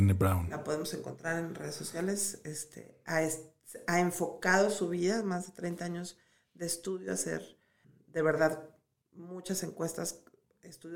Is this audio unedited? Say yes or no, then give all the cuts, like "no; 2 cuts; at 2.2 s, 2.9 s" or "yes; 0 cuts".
yes; 0 cuts